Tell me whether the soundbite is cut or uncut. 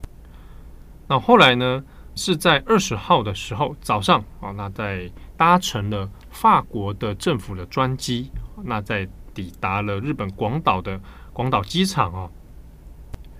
cut